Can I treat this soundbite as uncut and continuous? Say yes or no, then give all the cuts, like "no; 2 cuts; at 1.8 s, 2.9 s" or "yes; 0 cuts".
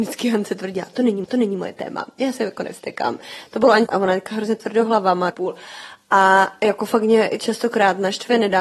no; 3 cuts; at 1.2 s, 3.9 s, 5.3 s